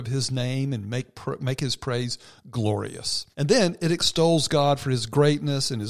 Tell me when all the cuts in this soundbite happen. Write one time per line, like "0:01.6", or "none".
0:03.3